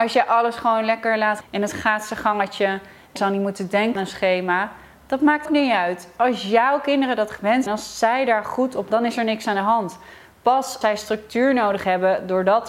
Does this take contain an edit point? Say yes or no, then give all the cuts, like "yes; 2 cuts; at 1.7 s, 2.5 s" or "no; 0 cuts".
yes; 7 cuts; at 1.4 s, 3.2 s, 4.0 s, 5.5 s, 7.7 s, 8.9 s, 10.8 s